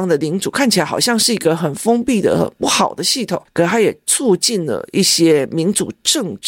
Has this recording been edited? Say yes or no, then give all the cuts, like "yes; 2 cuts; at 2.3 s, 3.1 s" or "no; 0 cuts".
no; 0 cuts